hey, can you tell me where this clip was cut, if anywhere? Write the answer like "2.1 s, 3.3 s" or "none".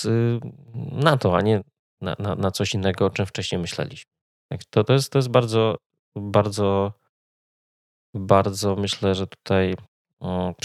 4.3 s